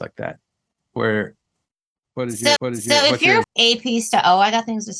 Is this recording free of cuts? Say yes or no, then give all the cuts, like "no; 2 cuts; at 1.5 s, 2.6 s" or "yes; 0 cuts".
no; 2 cuts; at 2.6 s, 3.4 s